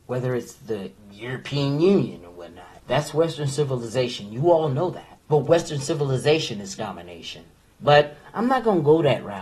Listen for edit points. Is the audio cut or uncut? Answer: cut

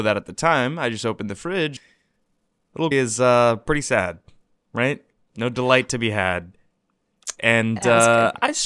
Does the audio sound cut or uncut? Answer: cut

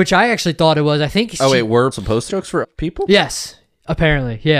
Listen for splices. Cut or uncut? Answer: cut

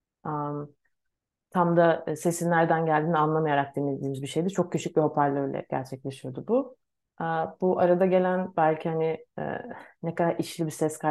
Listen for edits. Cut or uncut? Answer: uncut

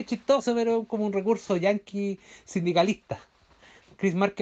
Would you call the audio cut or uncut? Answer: uncut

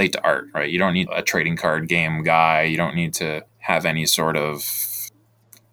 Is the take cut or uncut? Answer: cut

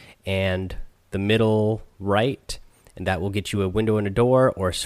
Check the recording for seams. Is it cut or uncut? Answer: uncut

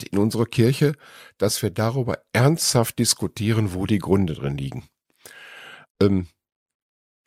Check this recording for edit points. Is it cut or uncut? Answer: uncut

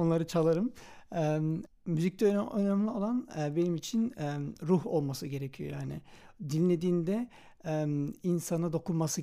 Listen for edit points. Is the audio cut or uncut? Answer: uncut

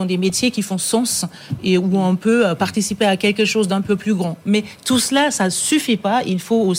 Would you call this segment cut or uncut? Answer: uncut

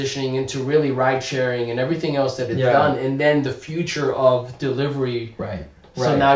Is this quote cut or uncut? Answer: uncut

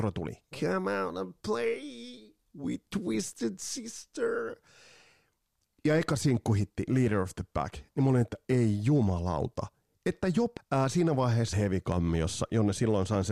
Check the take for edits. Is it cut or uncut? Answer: cut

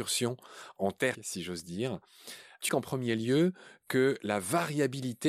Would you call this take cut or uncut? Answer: cut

